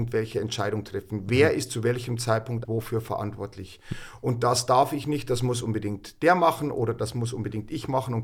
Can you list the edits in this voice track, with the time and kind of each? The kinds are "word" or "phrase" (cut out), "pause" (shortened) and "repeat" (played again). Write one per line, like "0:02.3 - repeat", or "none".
0:02.6 - word